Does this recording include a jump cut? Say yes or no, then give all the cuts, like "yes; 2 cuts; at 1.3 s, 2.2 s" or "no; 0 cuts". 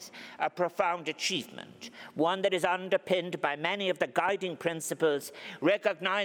no; 0 cuts